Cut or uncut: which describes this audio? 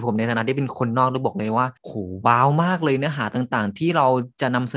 cut